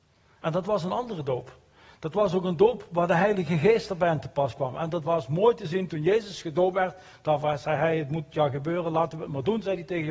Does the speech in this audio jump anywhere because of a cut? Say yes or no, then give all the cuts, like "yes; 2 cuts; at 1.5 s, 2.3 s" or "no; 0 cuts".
no; 0 cuts